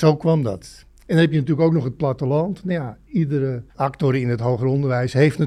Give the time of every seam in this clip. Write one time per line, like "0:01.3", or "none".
0:03.7